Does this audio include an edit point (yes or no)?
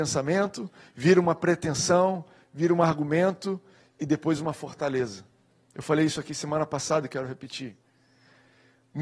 no